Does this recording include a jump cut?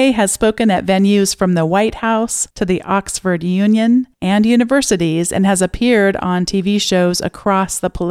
yes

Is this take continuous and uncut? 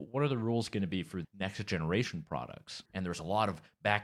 no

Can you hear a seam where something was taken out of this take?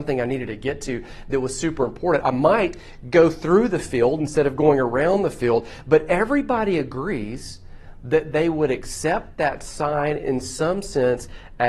yes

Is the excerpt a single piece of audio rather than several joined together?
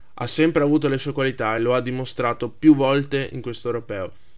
yes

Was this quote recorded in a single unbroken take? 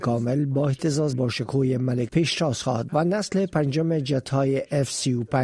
no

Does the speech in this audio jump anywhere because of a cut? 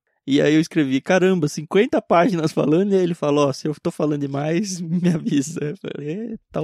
no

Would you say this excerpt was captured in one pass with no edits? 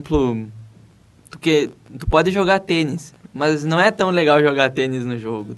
yes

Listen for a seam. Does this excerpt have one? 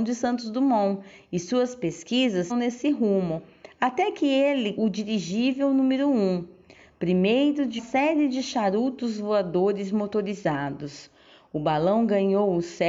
yes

